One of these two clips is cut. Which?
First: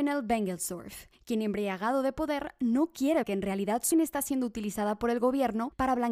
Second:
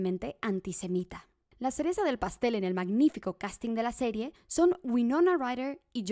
first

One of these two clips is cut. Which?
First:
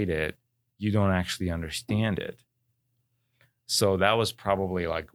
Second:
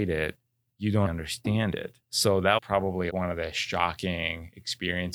second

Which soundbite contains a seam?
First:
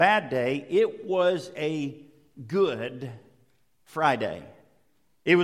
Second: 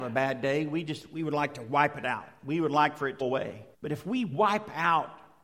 second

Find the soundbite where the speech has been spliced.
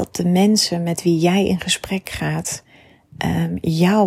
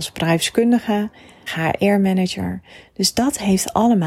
second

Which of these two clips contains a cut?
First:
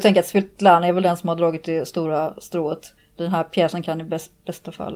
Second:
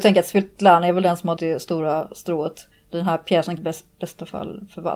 second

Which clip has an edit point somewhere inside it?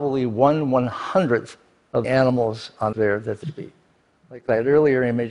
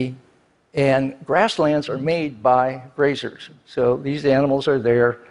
first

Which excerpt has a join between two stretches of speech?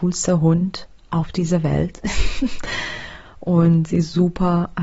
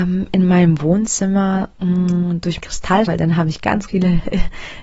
second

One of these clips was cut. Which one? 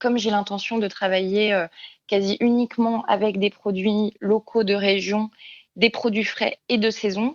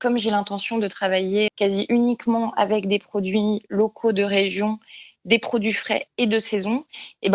second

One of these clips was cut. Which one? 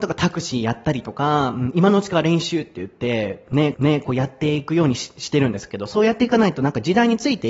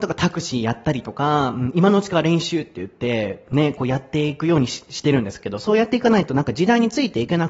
first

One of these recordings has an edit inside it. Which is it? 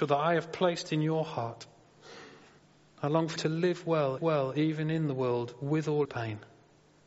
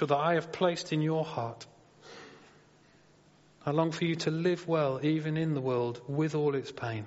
first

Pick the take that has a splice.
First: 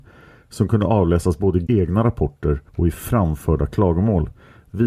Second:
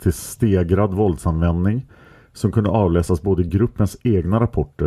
first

